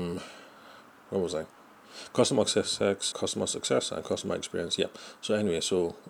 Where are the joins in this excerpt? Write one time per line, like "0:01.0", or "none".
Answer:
0:03.1